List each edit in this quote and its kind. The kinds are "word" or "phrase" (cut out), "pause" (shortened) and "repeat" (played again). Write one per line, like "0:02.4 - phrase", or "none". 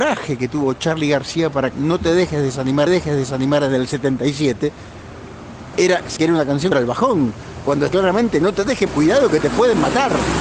0:01.7 - word
0:02.9 - repeat
0:05.7 - word
0:06.2 - word
0:06.7 - word
0:07.9 - word
0:08.9 - word